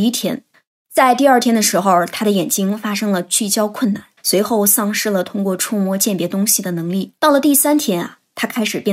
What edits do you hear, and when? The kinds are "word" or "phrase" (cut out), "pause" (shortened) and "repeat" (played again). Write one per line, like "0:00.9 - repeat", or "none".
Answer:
0:04.2 - pause
0:07.2 - pause